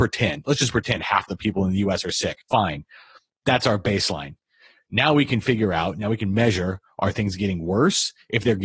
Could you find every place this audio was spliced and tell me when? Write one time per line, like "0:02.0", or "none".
0:02.4